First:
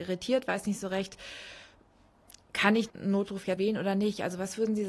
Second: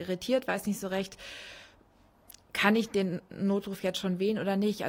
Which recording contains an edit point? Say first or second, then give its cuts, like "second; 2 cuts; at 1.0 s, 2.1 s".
first; 2 cuts; at 2.9 s, 3.6 s